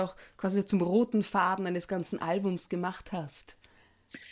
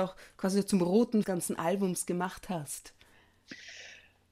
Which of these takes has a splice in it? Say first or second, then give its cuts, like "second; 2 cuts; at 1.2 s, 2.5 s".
second; 1 cut; at 1.2 s